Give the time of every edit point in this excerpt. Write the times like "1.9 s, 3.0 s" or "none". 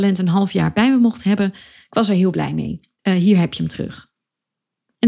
none